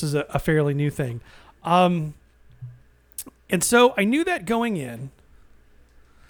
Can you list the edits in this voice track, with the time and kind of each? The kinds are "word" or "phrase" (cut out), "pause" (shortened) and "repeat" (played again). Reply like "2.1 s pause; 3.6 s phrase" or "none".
none